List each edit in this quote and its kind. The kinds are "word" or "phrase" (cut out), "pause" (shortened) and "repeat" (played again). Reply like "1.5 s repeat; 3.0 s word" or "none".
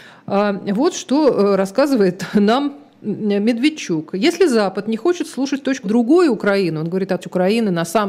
5.8 s word; 7.2 s phrase